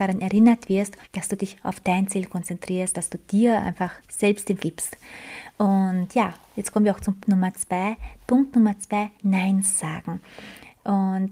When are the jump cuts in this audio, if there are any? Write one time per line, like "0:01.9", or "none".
0:01.0
0:02.9
0:04.0
0:04.6
0:07.2
0:09.1